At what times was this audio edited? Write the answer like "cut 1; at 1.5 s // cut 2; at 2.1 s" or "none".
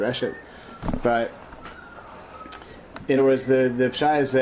cut 1; at 3.2 s